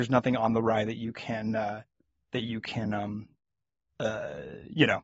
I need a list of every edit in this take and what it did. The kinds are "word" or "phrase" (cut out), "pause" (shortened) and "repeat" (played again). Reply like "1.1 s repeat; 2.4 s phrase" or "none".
none

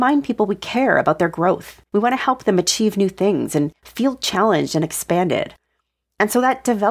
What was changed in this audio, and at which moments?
1.9 s pause; 3.8 s pause

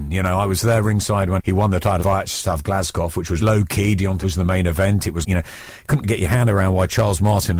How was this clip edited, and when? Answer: 1.4 s word; 2.0 s word; 3.4 s word; 4.2 s word; 5.2 s word; 6.0 s word

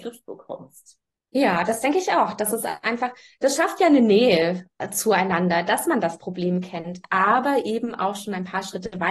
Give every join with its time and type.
none

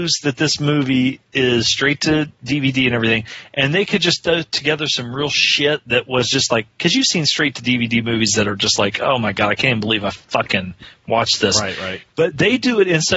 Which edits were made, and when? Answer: 1.3 s pause; 12.1 s pause

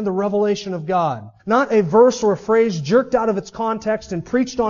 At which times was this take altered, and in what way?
1.4 s pause

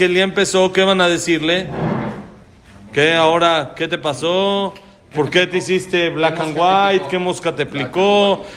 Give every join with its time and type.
none

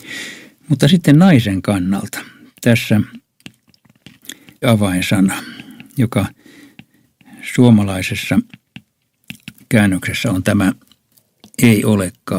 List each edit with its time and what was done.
4.6 s phrase

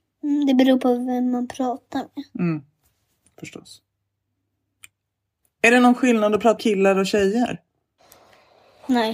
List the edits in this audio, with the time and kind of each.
6.6 s word

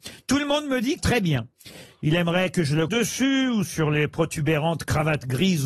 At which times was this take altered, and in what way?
1.0 s phrase; 2.9 s word

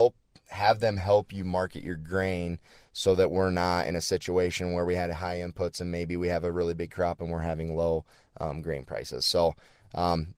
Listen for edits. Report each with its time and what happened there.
none

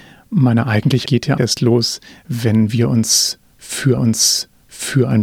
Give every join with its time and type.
1.1 s word; 1.4 s word; 4.0 s repeat

